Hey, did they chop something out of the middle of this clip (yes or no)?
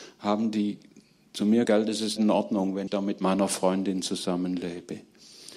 yes